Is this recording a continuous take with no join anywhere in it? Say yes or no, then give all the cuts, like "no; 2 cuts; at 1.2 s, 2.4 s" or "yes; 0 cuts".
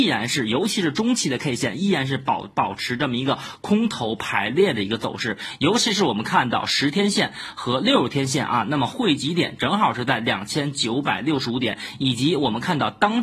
yes; 0 cuts